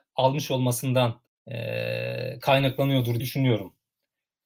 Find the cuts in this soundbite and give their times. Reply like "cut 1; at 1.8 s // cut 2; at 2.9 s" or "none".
cut 1; at 1.3 s // cut 2; at 3.2 s